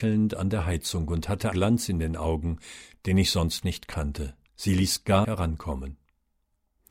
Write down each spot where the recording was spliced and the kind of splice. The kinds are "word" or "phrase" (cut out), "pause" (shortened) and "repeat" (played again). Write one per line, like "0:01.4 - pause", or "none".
0:01.5 - word
0:04.5 - pause
0:05.2 - phrase